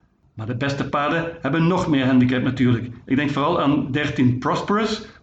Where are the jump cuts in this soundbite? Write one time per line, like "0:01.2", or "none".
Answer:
none